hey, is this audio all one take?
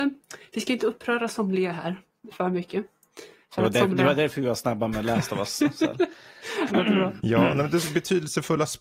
no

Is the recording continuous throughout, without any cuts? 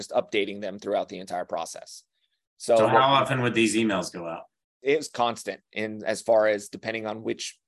yes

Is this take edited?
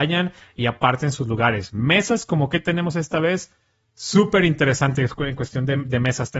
no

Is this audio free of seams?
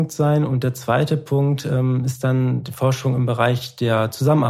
yes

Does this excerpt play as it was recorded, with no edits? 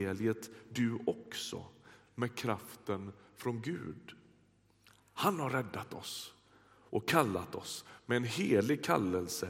yes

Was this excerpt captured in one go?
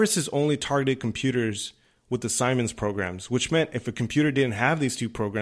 yes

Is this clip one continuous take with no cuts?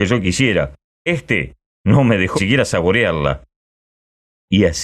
no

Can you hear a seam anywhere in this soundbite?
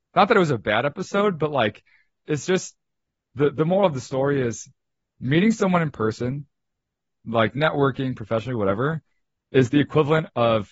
no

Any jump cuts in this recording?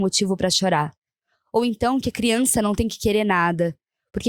no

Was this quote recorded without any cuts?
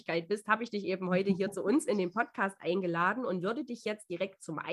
yes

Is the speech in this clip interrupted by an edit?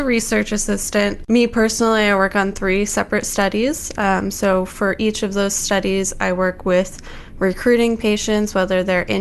no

